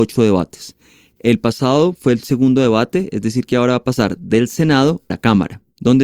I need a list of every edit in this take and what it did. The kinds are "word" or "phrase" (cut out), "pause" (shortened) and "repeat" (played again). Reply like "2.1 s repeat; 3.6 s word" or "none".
5.1 s word

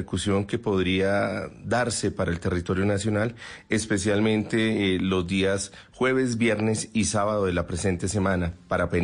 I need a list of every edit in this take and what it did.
none

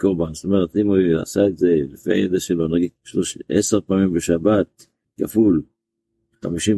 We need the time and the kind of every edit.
3.0 s pause; 5.0 s pause

